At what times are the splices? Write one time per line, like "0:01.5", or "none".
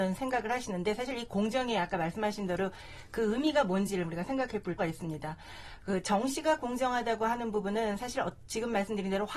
0:04.8